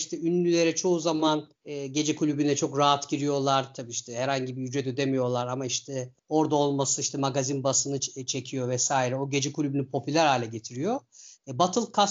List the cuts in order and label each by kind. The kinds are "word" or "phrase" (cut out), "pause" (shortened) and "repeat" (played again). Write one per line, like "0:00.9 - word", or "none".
0:01.6 - pause
0:06.2 - pause